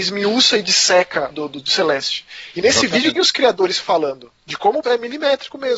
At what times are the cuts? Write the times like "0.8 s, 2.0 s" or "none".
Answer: 1.3 s, 3.2 s, 4.4 s, 4.8 s